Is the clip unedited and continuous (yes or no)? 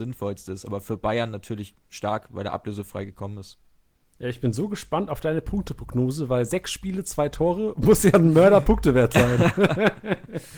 yes